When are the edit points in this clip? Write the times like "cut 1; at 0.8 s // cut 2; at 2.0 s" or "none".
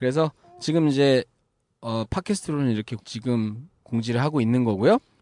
none